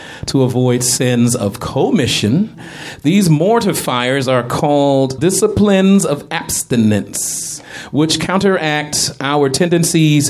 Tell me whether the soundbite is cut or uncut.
cut